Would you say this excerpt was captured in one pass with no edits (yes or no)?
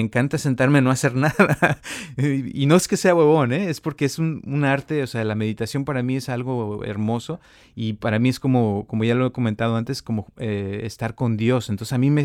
yes